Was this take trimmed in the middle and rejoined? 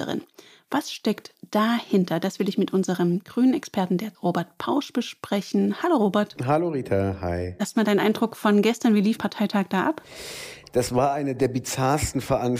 yes; 2 cuts; at 4.1 s, 9.2 s

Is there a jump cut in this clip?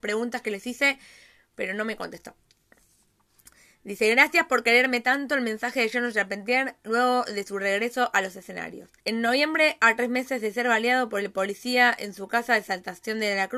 yes; 1 cut; at 9.0 s

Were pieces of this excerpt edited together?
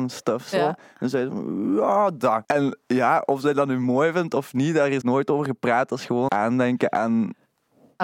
yes; 3 cuts; at 2.4 s, 5.0 s, 6.3 s

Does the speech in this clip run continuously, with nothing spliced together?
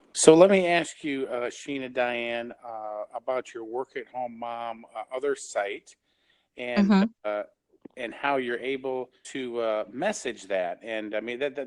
no; 1 cut; at 9.2 s

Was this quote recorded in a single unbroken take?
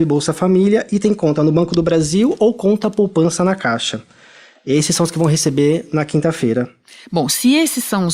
yes; 0 cuts

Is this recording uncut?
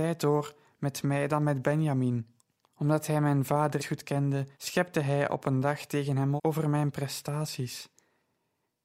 no; 4 cuts; at 2.4 s, 3.8 s, 4.5 s, 6.4 s

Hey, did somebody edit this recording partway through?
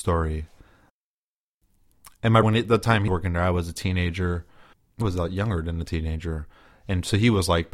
yes; 3 cuts; at 2.4 s, 3.1 s, 5.0 s

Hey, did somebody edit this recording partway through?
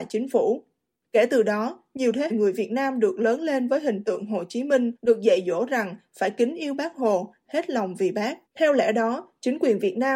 yes; 3 cuts; at 2.3 s, 5.0 s, 8.5 s

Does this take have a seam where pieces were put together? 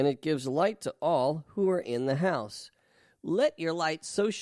no; 0 cuts

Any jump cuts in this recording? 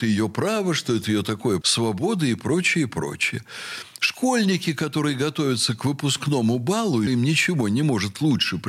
yes; 3 cuts; at 1.0 s, 1.6 s, 7.1 s

